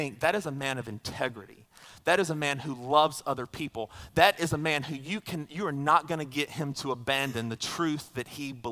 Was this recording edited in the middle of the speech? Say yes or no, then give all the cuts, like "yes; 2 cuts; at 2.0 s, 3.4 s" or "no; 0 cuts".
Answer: no; 0 cuts